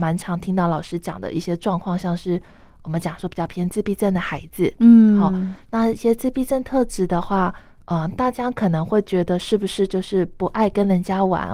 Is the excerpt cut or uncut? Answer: uncut